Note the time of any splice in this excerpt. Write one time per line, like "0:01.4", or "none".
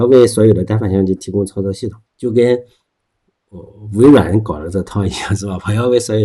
0:02.1